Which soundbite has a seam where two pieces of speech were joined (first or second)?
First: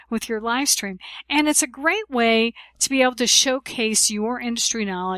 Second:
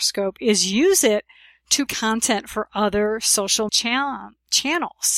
second